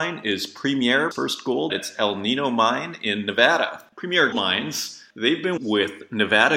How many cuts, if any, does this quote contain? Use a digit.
4